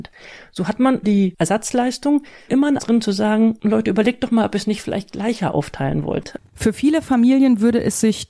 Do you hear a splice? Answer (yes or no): yes